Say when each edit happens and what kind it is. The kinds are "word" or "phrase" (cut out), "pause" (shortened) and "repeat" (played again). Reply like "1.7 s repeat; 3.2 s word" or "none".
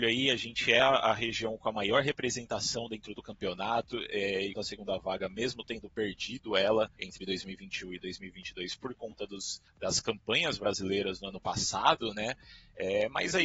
4.5 s word; 6.9 s pause